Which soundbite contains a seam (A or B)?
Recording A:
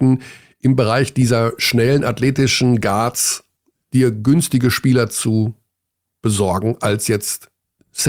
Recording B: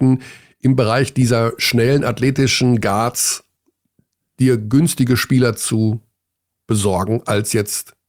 A